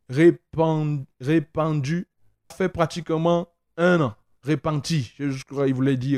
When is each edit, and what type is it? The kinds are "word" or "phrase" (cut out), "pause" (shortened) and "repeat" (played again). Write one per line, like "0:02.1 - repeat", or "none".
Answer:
0:02.5 - word